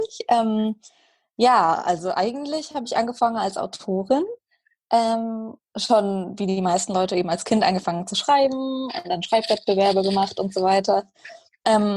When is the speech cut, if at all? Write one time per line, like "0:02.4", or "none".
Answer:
none

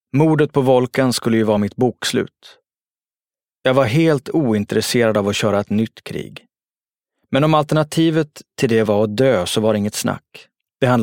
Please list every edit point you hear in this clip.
none

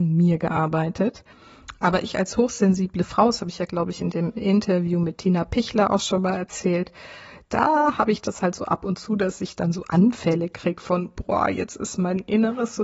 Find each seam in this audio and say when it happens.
none

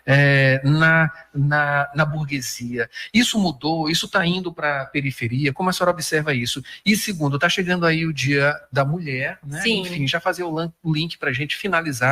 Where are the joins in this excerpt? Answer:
none

